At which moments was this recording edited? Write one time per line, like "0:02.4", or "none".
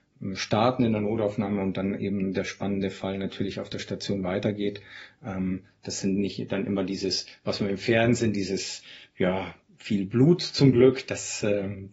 none